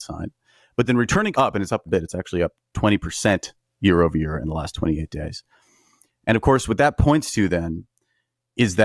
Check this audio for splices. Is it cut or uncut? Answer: cut